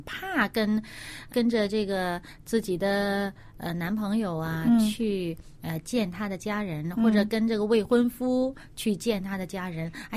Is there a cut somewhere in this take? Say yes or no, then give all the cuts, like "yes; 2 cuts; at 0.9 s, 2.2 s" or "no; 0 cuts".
yes; 2 cuts; at 1.3 s, 5.5 s